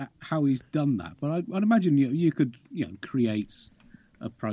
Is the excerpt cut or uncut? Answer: uncut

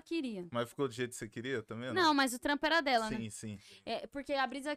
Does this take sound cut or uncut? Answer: uncut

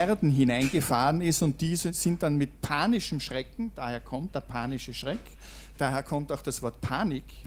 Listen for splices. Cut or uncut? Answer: uncut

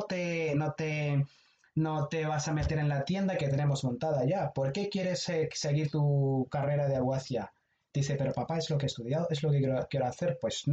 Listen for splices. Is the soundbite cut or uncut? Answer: uncut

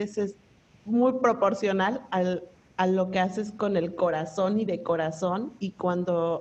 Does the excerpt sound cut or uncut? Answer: uncut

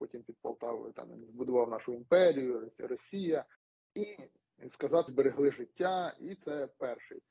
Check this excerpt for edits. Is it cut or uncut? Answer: cut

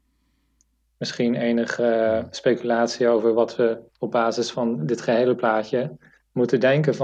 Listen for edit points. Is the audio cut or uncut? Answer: uncut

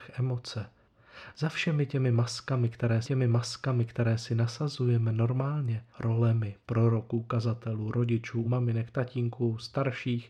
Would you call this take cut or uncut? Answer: cut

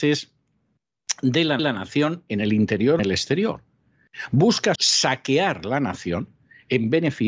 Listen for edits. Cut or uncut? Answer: cut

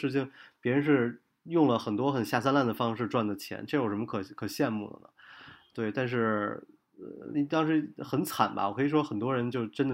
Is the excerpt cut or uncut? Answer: uncut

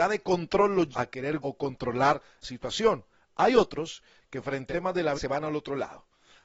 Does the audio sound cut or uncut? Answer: cut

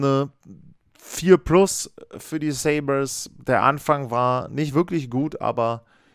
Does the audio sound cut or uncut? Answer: uncut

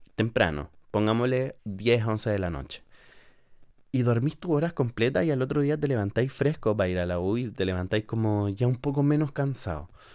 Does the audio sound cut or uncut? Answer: cut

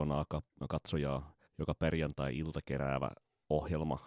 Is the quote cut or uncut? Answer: cut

